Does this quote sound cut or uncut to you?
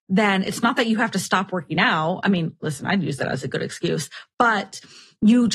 uncut